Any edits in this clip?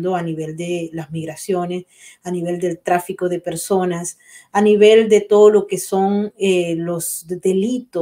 no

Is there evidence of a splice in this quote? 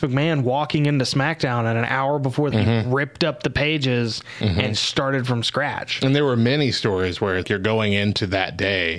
yes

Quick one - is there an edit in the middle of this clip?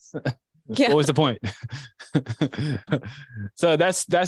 yes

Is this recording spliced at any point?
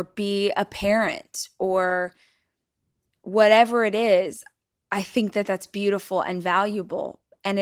no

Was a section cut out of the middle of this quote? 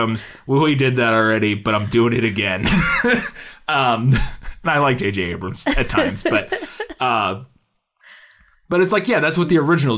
no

